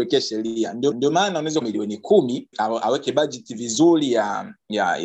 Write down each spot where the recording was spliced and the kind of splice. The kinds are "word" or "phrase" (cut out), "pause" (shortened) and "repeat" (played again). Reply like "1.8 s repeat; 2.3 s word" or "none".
0.9 s repeat; 1.6 s phrase; 2.5 s word